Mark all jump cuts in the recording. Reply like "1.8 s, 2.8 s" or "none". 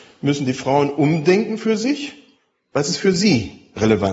2.4 s